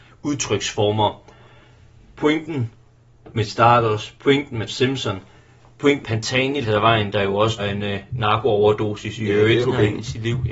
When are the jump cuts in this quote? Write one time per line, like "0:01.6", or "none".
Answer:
0:03.5
0:04.7
0:06.0
0:06.6
0:07.6
0:09.6